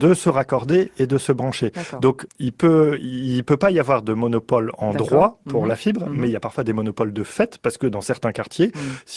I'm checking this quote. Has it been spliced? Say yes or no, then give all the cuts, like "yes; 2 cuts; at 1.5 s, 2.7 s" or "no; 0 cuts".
yes; 1 cut; at 2.3 s